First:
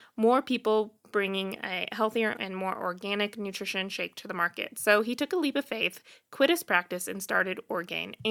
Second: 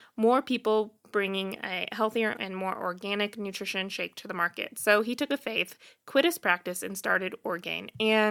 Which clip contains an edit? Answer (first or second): second